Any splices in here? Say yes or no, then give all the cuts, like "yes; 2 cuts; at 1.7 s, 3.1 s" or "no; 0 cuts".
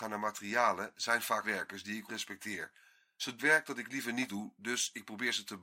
yes; 4 cuts; at 1.4 s, 2.1 s, 3.4 s, 4.3 s